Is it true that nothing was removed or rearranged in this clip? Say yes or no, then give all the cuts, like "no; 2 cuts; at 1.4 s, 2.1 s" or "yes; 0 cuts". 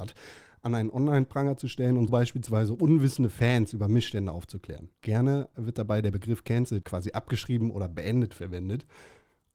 no; 3 cuts; at 2.1 s, 5.0 s, 6.8 s